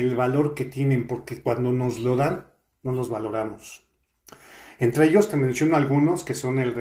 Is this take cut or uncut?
uncut